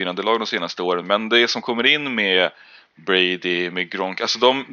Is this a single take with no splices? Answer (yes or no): yes